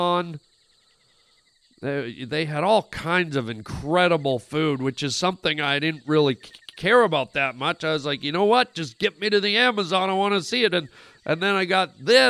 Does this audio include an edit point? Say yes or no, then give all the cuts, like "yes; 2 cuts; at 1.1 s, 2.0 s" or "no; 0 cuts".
no; 0 cuts